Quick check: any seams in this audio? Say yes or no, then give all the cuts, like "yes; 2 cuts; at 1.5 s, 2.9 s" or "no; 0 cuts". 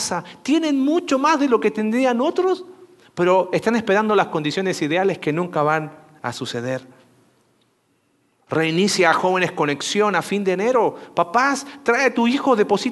no; 0 cuts